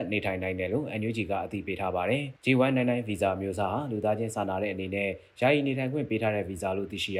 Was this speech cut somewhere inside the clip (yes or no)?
yes